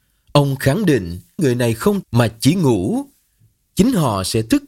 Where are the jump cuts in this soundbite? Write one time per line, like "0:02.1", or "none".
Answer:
0:01.4
0:02.0